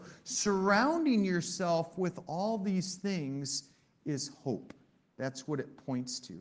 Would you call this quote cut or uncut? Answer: uncut